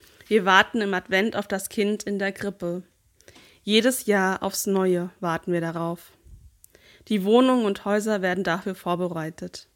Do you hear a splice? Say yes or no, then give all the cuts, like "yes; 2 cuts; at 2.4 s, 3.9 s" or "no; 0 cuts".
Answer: no; 0 cuts